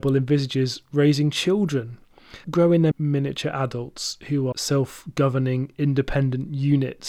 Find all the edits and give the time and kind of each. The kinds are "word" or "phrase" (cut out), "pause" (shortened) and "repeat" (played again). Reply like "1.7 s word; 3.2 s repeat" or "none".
2.4 s word; 2.9 s word; 4.5 s word